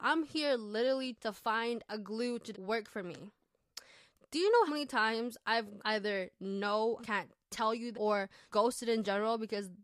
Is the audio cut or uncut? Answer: cut